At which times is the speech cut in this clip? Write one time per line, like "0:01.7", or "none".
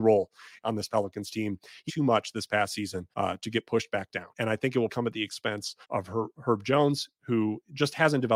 0:01.9
0:03.1
0:04.3
0:04.9
0:05.8